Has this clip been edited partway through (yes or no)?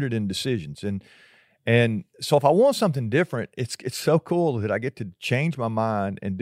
no